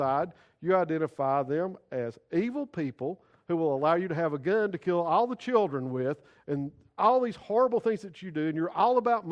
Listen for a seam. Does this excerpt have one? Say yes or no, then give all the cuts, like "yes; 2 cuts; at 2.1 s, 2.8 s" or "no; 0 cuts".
no; 0 cuts